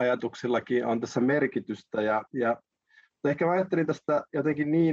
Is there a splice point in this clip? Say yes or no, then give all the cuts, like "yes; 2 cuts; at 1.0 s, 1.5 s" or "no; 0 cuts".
yes; 1 cut; at 2.3 s